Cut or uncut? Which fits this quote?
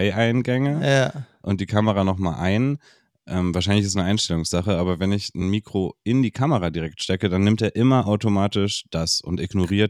uncut